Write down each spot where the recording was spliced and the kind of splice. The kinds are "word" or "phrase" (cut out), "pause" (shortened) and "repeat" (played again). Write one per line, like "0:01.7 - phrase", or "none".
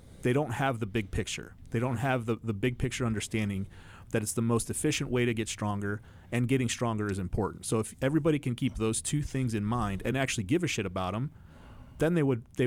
none